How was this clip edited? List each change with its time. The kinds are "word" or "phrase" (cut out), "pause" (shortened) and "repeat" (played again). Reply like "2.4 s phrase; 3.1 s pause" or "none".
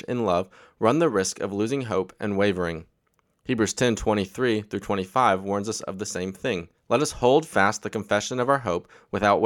6.8 s pause